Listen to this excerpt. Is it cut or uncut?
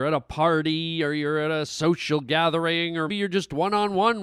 cut